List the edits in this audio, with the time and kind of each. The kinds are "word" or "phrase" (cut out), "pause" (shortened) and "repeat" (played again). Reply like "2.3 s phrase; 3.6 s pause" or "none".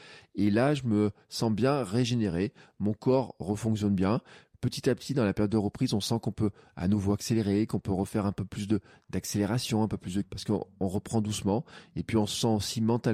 10.2 s word

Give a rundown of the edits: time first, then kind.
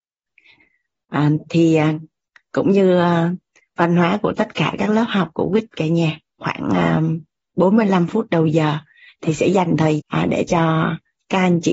6.4 s word; 10.0 s word

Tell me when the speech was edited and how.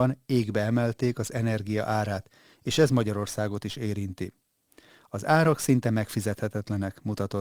none

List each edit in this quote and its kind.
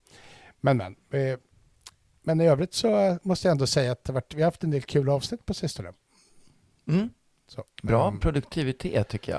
none

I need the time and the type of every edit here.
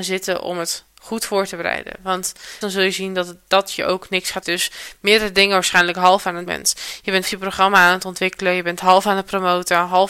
2.6 s word; 4.4 s phrase; 6.5 s word; 7.2 s word

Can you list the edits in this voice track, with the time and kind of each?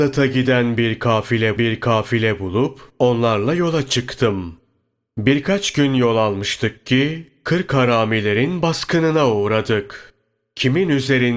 1.6 s repeat

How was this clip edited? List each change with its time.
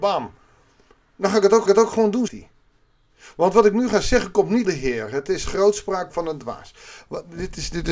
1.7 s repeat; 2.3 s word; 4.6 s word

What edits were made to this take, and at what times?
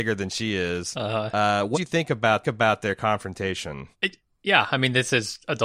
1.7 s word; 2.4 s repeat; 3.9 s pause

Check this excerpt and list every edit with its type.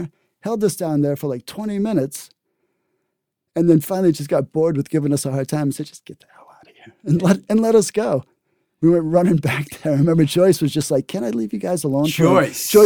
none

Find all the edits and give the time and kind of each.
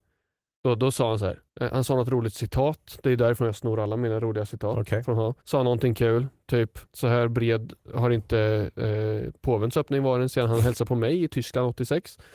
1.5 s pause; 5.4 s pause; 6.9 s pause

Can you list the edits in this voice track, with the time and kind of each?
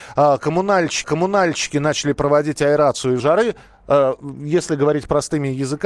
1.0 s repeat; 3.2 s word

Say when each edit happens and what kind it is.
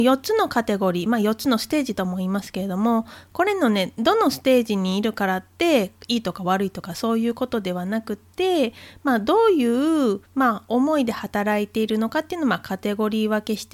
10.2 s pause

